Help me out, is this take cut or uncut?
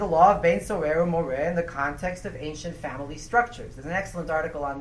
uncut